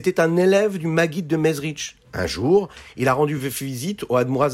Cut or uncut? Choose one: uncut